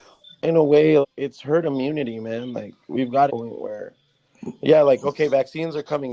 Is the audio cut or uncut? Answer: cut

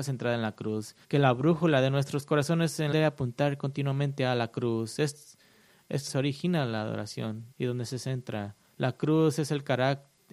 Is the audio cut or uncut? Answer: cut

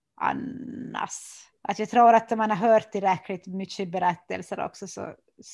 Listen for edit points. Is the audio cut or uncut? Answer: cut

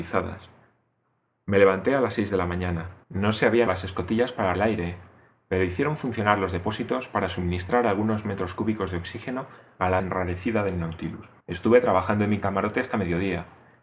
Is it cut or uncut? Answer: cut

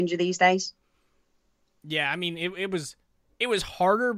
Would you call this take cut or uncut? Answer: uncut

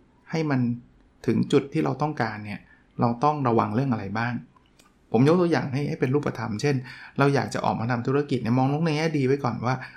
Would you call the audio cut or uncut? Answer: uncut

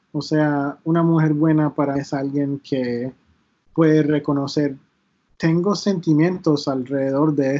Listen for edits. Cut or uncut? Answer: cut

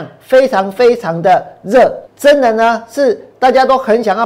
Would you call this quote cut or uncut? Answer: cut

